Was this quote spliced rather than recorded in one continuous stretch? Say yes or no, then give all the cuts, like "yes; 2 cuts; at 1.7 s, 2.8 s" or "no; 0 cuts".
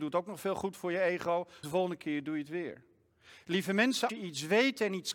yes; 2 cuts; at 1.6 s, 4.1 s